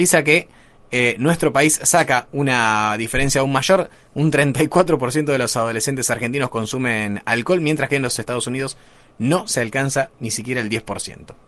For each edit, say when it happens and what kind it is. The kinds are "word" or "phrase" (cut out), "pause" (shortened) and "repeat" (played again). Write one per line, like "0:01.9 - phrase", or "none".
none